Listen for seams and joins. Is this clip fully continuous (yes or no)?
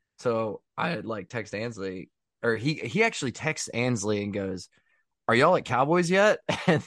yes